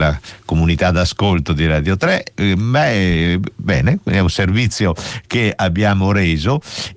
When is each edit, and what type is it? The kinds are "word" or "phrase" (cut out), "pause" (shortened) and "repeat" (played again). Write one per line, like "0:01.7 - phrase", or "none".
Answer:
none